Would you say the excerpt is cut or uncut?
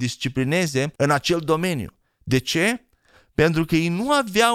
cut